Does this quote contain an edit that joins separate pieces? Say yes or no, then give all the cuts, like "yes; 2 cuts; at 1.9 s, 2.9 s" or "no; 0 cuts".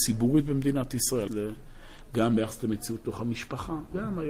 yes; 1 cut; at 1.3 s